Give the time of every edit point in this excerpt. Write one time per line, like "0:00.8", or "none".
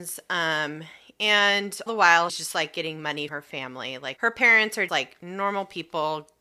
0:01.9
0:02.3
0:03.3
0:04.2
0:04.9